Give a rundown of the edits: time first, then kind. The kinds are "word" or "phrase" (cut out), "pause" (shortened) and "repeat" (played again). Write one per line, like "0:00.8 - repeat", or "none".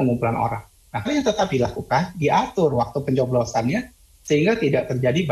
0:01.1 - phrase